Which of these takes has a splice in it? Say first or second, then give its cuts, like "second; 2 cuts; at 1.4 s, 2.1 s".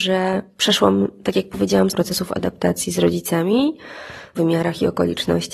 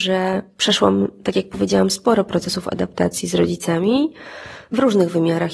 first; 2 cuts; at 1.9 s, 4.3 s